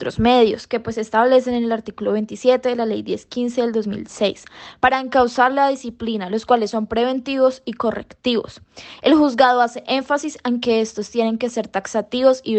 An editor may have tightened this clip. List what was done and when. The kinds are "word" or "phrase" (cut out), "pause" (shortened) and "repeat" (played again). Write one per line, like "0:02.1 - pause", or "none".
none